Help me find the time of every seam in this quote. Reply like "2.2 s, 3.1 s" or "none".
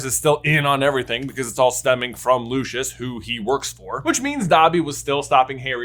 none